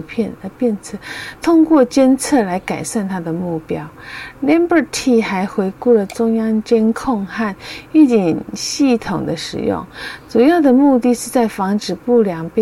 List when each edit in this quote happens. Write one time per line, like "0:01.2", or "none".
0:01.4